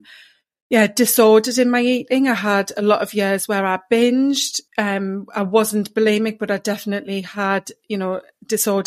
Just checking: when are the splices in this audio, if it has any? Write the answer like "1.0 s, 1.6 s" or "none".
4.7 s